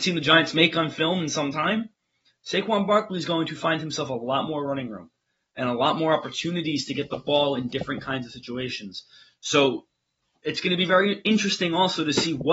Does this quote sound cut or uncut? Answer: uncut